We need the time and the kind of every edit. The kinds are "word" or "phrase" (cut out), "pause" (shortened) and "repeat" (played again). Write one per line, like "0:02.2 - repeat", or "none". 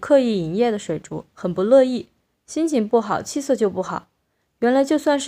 0:01.3 - pause